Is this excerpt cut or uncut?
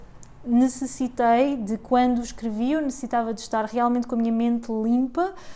uncut